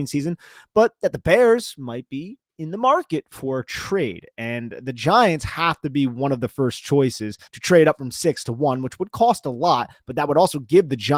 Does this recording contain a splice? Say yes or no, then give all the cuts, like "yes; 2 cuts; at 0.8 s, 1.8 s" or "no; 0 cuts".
yes; 2 cuts; at 2.5 s, 7.5 s